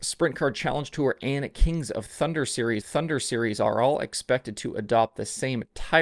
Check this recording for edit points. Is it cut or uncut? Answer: cut